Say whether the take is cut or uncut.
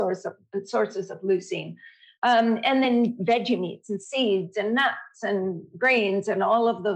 uncut